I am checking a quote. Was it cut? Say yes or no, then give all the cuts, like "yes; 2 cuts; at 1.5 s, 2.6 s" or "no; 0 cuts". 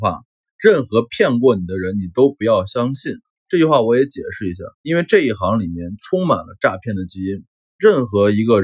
yes; 2 cuts; at 3.2 s, 4.7 s